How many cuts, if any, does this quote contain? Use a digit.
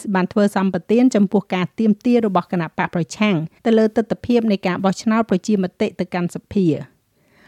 1